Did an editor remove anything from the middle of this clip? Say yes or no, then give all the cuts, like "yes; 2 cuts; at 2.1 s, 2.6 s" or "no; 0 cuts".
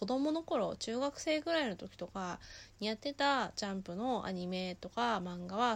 no; 0 cuts